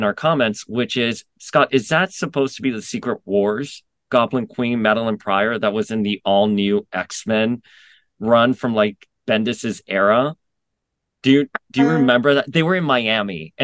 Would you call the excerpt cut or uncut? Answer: uncut